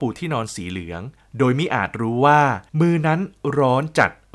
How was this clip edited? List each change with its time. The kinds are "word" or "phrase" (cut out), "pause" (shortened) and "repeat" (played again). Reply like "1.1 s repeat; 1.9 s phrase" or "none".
2.7 s pause